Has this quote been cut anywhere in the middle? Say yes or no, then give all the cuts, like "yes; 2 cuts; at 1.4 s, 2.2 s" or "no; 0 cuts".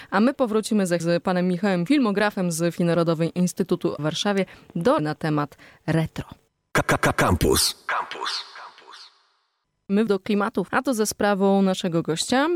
yes; 7 cuts; at 1.0 s, 1.9 s, 2.8 s, 4.0 s, 5.0 s, 10.1 s, 10.7 s